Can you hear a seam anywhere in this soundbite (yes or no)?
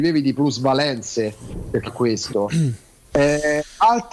yes